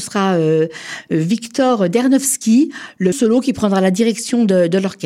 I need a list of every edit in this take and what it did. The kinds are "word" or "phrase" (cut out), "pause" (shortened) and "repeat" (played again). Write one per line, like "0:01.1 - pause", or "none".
0:03.1 - word